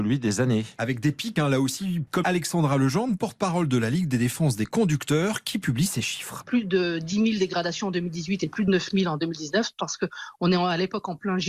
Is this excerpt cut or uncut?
cut